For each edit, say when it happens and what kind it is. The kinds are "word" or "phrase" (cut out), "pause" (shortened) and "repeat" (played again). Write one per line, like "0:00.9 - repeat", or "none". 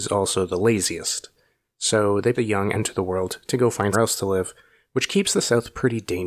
0:02.3 - word
0:02.7 - word
0:03.9 - word